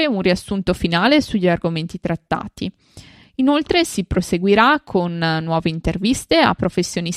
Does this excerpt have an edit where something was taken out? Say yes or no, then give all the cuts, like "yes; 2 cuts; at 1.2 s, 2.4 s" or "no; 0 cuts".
no; 0 cuts